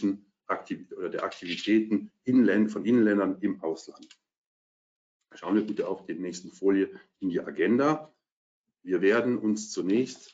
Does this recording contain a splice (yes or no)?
no